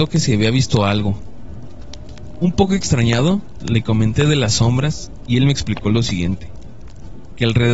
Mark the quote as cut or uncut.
uncut